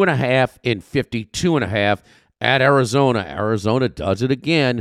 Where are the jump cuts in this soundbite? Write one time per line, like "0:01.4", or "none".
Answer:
none